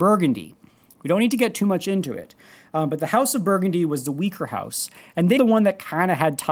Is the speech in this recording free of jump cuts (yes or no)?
no